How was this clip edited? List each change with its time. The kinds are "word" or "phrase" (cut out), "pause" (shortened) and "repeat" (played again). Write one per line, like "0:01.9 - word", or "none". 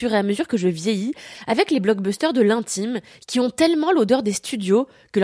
none